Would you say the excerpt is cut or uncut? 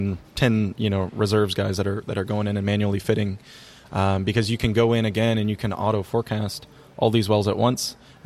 uncut